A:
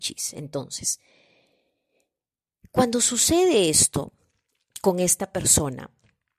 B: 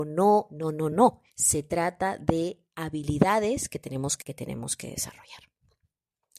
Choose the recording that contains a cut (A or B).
B